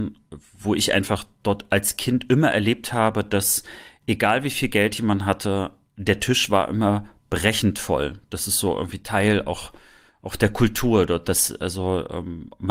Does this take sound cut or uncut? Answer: uncut